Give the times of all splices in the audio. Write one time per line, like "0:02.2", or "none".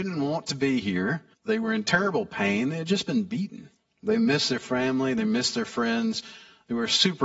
0:01.3
0:03.8